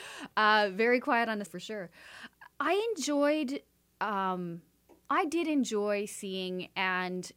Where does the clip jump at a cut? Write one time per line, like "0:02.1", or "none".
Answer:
0:01.5
0:02.5